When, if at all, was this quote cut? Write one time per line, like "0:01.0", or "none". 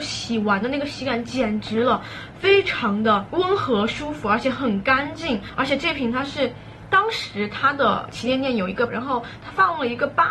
0:08.9

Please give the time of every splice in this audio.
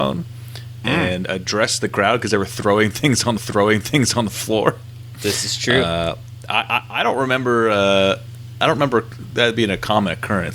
0:03.4

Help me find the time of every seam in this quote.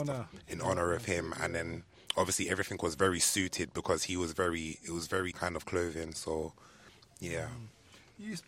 0:05.3

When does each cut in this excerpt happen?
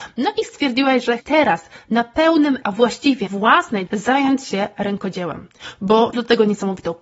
0:01.2
0:02.6
0:03.3
0:03.9
0:06.1

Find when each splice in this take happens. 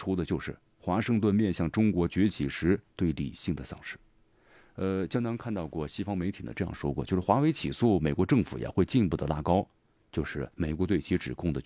0:02.9
0:10.5

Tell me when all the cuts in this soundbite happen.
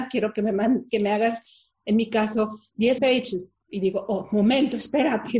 0:03.0

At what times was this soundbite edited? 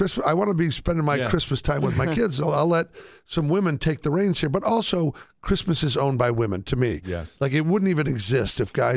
none

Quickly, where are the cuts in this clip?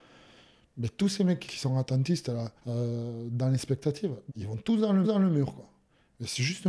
0:01.5
0:02.6
0:04.3
0:05.0

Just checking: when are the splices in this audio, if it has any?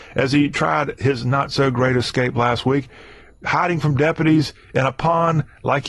none

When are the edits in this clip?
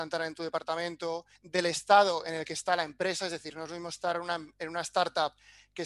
0:01.4

